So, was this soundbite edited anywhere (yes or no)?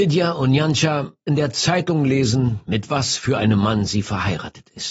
yes